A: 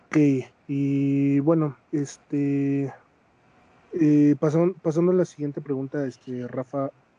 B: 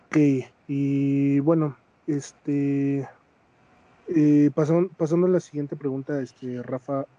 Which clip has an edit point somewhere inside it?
A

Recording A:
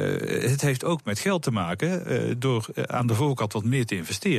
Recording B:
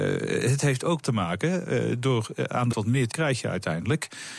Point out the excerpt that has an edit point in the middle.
B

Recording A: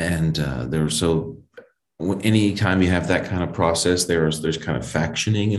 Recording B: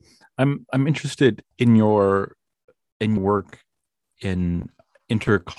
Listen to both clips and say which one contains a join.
B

